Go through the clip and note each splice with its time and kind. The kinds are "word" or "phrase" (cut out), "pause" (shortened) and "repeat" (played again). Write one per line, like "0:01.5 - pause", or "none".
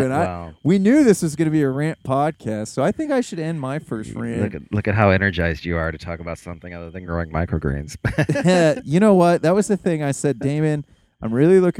none